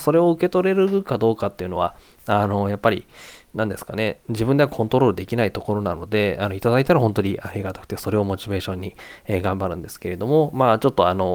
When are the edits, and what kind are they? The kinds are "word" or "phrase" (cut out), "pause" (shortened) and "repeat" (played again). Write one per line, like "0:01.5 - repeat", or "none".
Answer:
none